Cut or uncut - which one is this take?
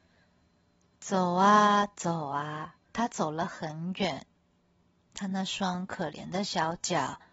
cut